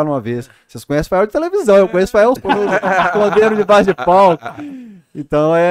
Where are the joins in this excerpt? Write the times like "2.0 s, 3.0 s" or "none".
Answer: 2.4 s